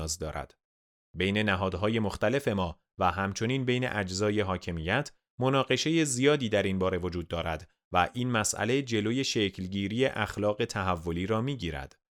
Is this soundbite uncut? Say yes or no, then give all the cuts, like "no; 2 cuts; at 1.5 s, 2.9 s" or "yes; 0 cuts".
yes; 0 cuts